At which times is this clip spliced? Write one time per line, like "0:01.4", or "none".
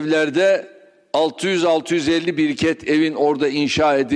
none